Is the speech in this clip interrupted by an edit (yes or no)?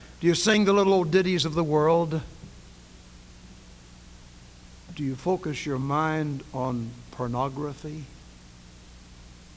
no